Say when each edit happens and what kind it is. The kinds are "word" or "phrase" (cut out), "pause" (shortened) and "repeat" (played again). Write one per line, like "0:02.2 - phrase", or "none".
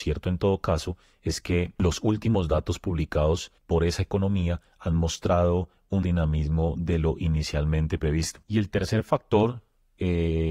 0:03.6 - word
0:06.0 - word
0:08.4 - pause